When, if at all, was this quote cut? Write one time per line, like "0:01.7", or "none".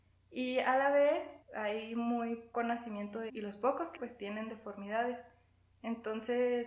0:01.4
0:02.5
0:03.3
0:04.0

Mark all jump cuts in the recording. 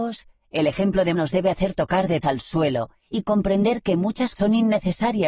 0:01.1
0:02.2
0:04.3

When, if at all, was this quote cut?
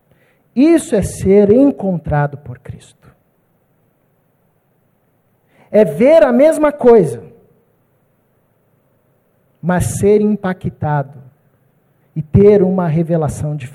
none

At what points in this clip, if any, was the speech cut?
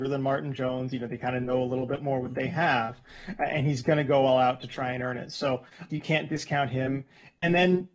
0:05.9

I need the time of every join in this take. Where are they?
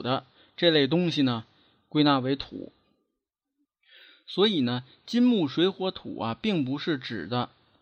none

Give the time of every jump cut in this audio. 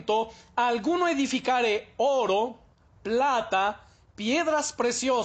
none

